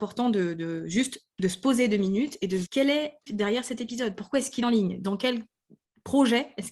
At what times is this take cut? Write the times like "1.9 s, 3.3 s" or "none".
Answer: 2.7 s, 3.3 s, 4.6 s